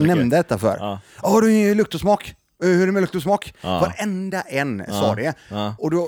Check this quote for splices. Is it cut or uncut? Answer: uncut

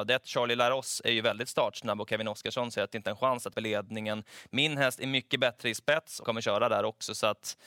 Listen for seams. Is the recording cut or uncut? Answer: cut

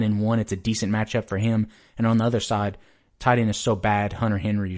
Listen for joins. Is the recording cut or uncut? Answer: uncut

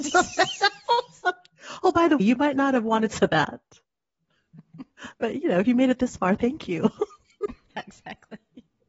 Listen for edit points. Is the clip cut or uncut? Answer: cut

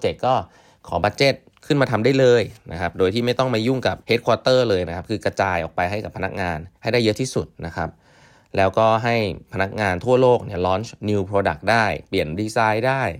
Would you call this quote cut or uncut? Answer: cut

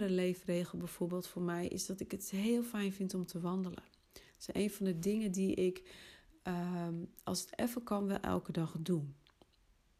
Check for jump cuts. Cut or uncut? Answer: uncut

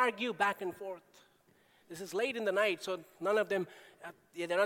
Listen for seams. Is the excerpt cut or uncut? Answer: uncut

